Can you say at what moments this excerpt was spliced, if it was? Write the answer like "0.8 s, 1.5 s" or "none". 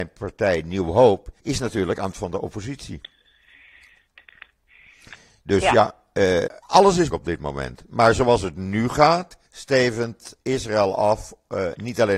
1.4 s, 2.1 s, 6.5 s, 7.1 s, 9.5 s